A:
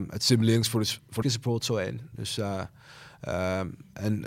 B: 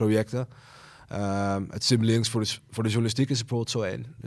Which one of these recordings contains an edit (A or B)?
A